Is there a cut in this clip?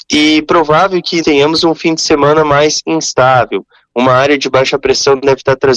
yes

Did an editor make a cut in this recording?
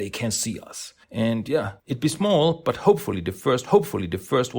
yes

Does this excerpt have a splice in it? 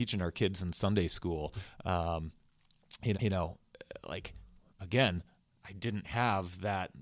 yes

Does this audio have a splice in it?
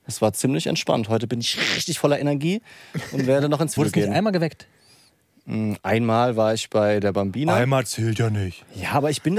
yes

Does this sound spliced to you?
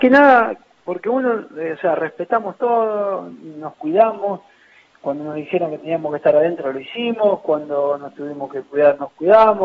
no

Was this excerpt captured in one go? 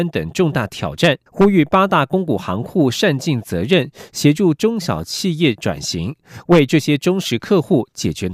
no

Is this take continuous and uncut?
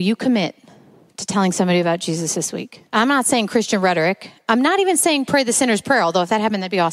no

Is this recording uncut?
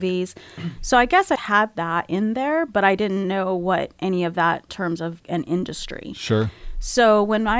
no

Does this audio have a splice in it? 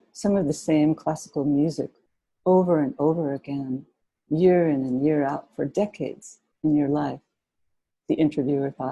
no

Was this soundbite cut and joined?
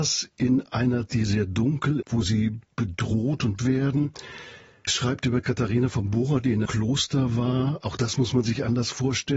yes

